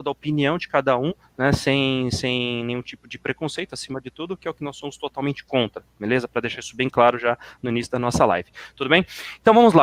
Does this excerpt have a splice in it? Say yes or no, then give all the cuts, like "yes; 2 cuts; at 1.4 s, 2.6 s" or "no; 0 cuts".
no; 0 cuts